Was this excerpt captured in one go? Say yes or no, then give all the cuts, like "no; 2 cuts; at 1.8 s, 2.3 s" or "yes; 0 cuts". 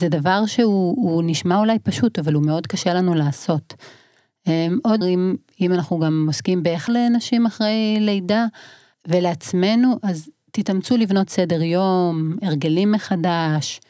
no; 3 cuts; at 5.0 s, 6.9 s, 8.9 s